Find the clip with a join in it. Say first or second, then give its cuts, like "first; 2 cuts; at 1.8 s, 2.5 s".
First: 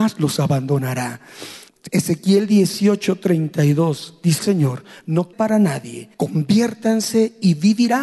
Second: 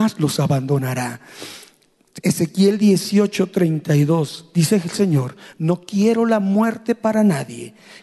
first; 4 cuts; at 1.7 s, 4.4 s, 5.3 s, 6.1 s